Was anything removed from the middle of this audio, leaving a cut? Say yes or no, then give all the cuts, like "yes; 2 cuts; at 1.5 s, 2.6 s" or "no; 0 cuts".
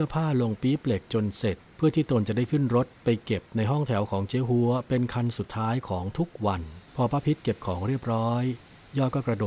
yes; 2 cuts; at 1.7 s, 6.9 s